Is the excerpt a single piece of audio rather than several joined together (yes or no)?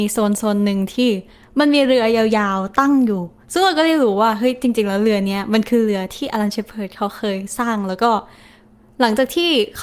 yes